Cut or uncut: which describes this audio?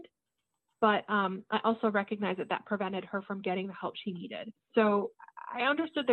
cut